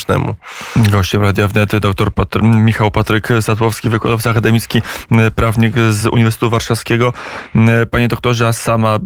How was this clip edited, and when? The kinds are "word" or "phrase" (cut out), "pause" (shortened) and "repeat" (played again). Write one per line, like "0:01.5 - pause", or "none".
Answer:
none